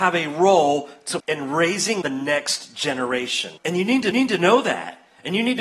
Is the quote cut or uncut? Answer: cut